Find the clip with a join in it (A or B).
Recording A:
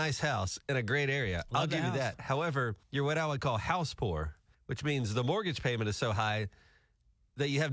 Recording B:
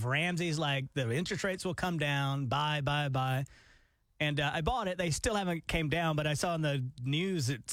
A